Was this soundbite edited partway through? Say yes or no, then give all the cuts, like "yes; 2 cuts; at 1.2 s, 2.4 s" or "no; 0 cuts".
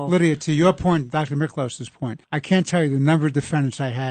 yes; 1 cut; at 2.2 s